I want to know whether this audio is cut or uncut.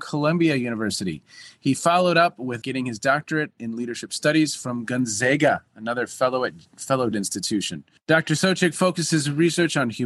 cut